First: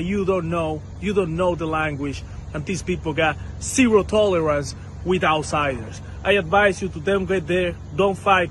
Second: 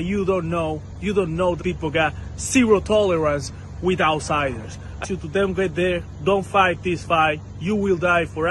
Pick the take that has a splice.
second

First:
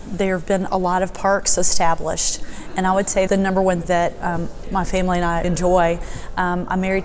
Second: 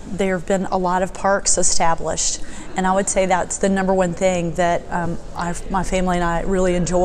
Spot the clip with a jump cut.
first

